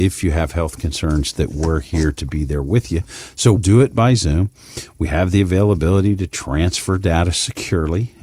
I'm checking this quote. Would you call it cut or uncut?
cut